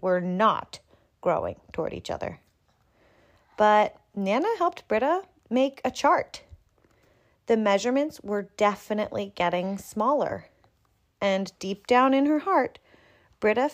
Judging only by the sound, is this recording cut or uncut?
uncut